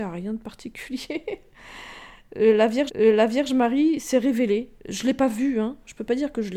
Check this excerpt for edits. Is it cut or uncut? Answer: cut